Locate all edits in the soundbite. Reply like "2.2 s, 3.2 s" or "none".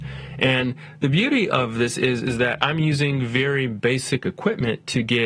none